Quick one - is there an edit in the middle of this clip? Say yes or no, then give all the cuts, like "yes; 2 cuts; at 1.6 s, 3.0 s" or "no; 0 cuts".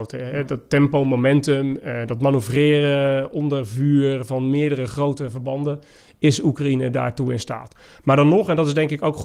no; 0 cuts